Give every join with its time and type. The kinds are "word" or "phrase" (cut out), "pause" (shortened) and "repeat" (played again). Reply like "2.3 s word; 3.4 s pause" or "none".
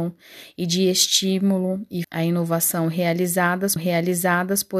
2.0 s word; 3.8 s repeat